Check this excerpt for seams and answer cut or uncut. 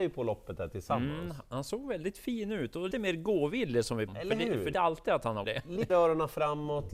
cut